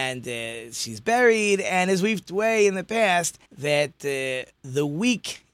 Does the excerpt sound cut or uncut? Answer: cut